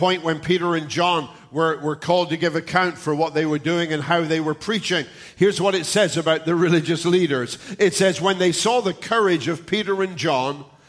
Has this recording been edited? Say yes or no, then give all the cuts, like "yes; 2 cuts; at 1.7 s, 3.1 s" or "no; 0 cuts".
no; 0 cuts